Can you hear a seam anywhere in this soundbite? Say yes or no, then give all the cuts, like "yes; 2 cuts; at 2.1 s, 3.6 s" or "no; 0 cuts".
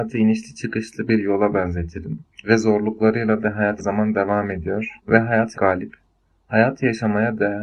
yes; 5 cuts; at 2.3 s, 3.4 s, 3.8 s, 5.0 s, 5.5 s